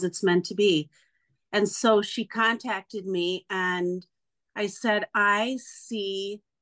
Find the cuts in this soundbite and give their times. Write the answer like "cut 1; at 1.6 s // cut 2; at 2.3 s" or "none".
none